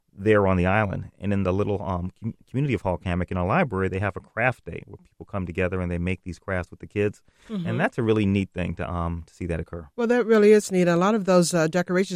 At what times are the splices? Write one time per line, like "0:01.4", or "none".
0:09.9